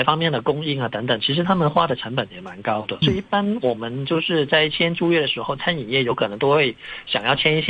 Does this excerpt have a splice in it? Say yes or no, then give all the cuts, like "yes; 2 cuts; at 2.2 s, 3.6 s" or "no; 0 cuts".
yes; 1 cut; at 3.0 s